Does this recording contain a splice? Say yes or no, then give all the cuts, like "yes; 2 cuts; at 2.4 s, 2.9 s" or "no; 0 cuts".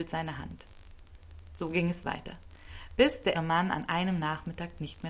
yes; 1 cut; at 3.3 s